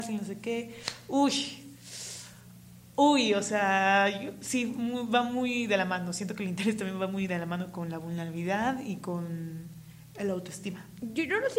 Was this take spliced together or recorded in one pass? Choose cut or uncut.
uncut